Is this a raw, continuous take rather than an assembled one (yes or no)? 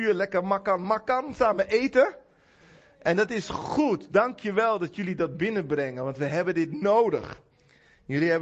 yes